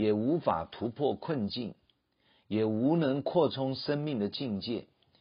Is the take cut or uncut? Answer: uncut